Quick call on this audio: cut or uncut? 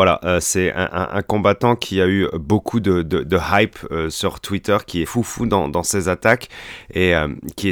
cut